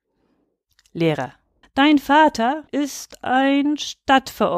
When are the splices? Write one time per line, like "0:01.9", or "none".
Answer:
0:01.6
0:02.7